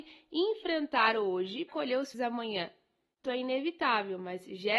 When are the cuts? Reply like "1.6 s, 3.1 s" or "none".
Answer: 1.7 s, 2.1 s, 3.2 s